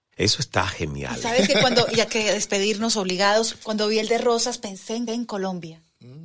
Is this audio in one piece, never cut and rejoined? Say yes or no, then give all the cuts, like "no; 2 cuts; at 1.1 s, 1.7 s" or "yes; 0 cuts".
no; 2 cuts; at 2.1 s, 5.1 s